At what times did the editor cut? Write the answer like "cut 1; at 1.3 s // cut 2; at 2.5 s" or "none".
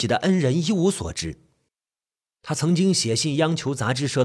cut 1; at 1.7 s